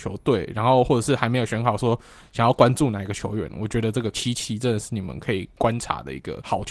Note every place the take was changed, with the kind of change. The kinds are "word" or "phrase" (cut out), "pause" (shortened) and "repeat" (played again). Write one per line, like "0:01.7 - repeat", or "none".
0:04.1 - word